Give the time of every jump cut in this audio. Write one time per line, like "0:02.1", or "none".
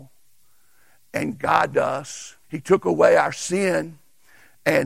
0:01.7
0:02.4